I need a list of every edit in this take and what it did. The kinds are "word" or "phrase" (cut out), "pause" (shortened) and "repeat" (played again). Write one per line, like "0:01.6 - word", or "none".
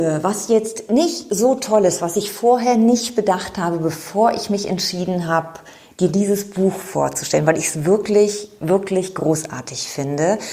none